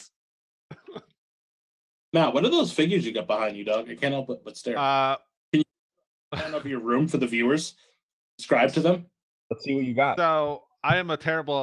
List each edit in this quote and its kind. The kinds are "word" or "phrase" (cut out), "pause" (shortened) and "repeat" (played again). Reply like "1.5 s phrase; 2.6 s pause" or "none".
none